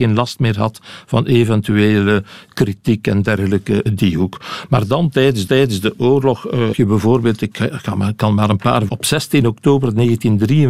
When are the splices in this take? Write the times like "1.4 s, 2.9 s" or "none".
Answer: 3.9 s, 5.5 s, 6.7 s, 8.9 s